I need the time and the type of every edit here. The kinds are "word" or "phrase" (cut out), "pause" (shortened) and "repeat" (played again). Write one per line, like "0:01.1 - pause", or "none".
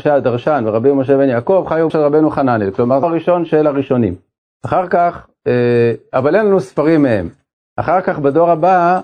0:01.9 - word
0:03.0 - word